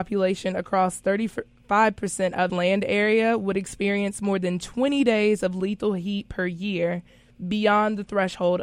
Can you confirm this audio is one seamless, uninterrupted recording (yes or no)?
no